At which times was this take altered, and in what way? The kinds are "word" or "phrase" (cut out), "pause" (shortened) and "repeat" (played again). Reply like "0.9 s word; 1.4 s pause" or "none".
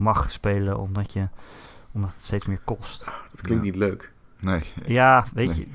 none